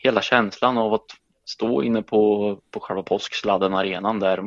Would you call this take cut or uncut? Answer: uncut